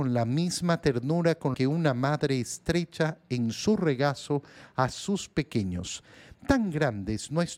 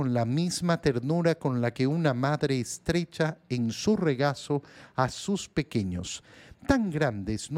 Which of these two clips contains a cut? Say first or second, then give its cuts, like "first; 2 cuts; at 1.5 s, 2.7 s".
first; 1 cut; at 1.5 s